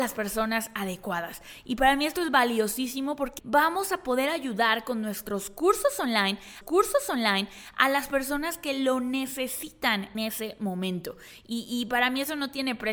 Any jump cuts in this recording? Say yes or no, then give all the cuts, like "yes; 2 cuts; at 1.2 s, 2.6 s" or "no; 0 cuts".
yes; 3 cuts; at 3.4 s, 6.6 s, 10.1 s